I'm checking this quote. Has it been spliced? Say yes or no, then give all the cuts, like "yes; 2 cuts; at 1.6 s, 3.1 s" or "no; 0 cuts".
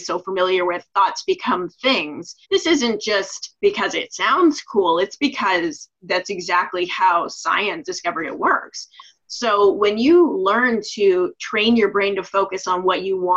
yes; 3 cuts; at 2.4 s, 3.6 s, 7.8 s